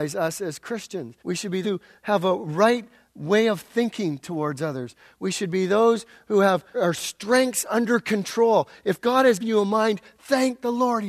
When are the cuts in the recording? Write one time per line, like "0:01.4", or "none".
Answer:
0:01.2
0:01.6
0:06.7
0:09.4